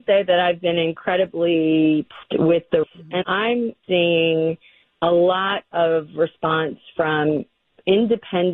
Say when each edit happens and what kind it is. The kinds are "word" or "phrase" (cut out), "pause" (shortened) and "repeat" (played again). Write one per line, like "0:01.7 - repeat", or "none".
0:02.2 - word
0:02.8 - word
0:03.2 - word
0:03.8 - word